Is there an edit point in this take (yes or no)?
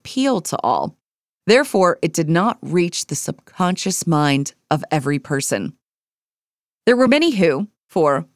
no